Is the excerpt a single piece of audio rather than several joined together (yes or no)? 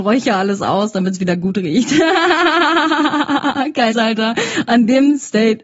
no